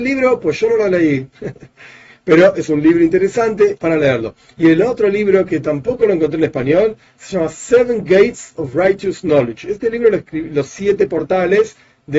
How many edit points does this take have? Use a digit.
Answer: 1